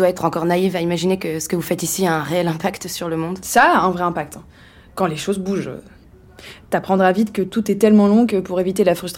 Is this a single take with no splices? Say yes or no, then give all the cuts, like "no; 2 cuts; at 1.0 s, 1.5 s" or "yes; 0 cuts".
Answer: yes; 0 cuts